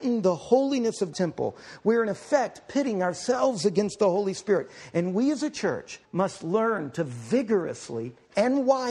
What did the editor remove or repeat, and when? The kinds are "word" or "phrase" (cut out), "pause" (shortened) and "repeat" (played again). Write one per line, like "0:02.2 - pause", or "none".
0:01.1 - word
0:06.0 - pause